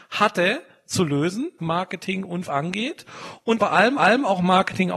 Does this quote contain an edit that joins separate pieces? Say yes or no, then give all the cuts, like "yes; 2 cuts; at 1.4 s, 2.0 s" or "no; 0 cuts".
yes; 4 cuts; at 1.6 s, 2.4 s, 3.6 s, 4.0 s